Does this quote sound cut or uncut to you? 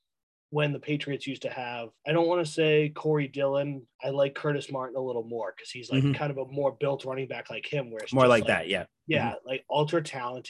cut